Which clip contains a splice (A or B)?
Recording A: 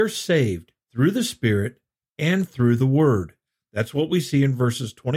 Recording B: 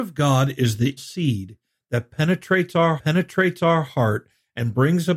B